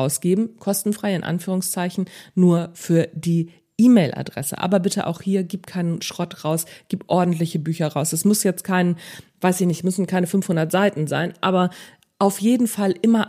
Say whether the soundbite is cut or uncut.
uncut